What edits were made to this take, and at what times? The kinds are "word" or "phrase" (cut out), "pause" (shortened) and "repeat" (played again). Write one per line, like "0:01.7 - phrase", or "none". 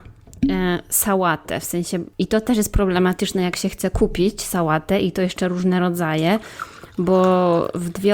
0:02.1 - pause

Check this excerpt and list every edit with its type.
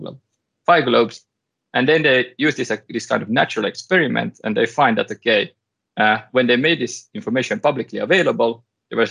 none

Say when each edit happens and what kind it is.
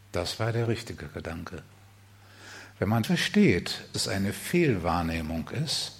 0:03.0 - word
0:03.9 - word

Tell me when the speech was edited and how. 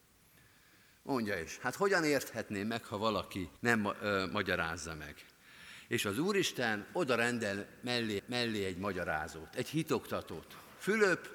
0:03.6 - pause
0:08.2 - repeat

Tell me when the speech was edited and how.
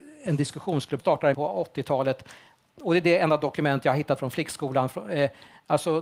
0:01.0 - phrase
0:01.3 - word

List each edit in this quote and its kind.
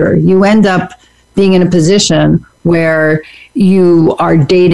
none

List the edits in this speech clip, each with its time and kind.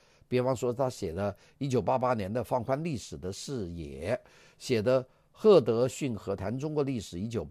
none

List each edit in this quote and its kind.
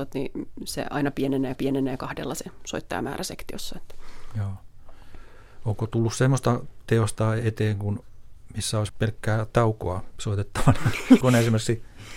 0:01.5 - repeat
0:08.9 - word
0:11.2 - word

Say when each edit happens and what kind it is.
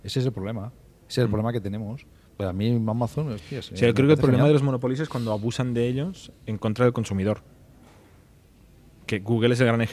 none

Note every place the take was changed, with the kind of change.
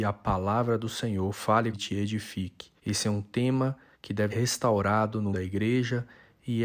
0:01.7 - phrase
0:02.8 - pause
0:03.9 - pause
0:04.3 - word
0:05.3 - word

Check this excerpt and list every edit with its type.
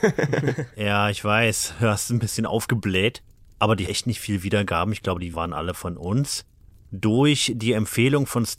0:03.9 - word
0:05.3 - word

